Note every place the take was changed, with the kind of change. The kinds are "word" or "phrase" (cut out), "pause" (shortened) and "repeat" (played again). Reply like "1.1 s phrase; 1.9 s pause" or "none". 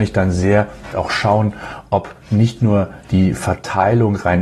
0.9 s word